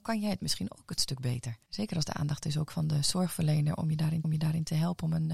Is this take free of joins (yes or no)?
no